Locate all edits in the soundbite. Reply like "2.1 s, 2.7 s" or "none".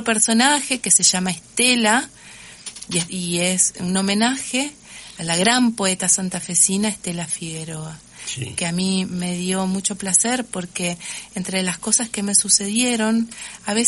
3.1 s